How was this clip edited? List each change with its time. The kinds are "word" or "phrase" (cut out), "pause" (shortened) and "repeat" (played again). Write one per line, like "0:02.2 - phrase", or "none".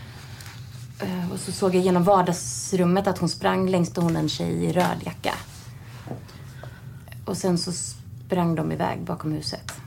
0:03.9 - phrase